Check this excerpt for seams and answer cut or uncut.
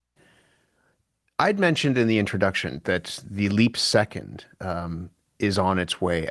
uncut